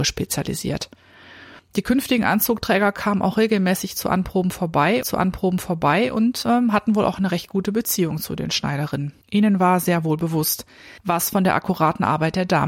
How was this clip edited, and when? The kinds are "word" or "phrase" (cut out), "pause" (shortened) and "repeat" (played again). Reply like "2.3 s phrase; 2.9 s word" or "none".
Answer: 1.6 s pause; 5.0 s repeat; 9.2 s pause; 11.0 s pause